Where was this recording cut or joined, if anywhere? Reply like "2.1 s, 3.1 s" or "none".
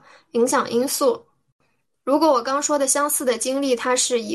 none